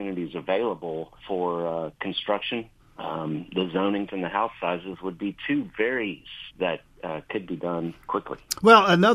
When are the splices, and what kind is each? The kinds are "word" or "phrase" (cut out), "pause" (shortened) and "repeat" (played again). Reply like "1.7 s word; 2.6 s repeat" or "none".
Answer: 1.2 s pause; 2.8 s pause; 4.1 s word; 6.5 s phrase

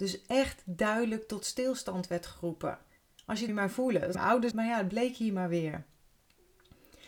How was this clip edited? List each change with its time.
3.5 s phrase; 4.1 s word; 4.5 s word

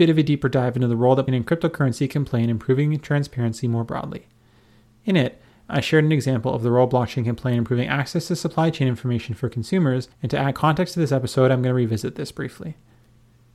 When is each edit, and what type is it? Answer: 1.3 s word; 10.1 s pause

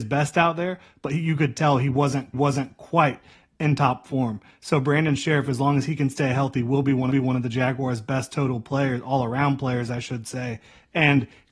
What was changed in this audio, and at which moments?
2.3 s repeat; 7.1 s repeat

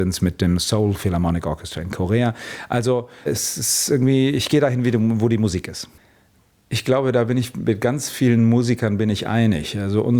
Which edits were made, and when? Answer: 3.3 s word

